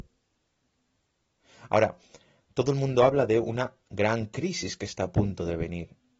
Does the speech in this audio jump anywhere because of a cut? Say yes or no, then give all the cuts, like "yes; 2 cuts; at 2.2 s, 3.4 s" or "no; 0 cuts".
no; 0 cuts